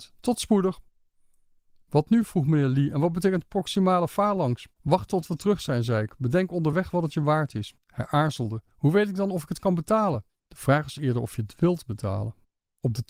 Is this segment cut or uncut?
cut